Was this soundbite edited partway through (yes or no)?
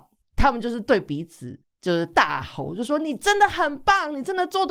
yes